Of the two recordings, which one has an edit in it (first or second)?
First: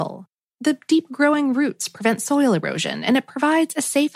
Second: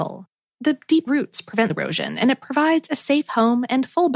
second